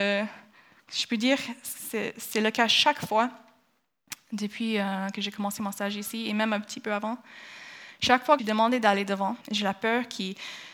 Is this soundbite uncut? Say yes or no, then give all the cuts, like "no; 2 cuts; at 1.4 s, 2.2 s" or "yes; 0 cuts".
no; 2 cuts; at 8.4 s, 9.4 s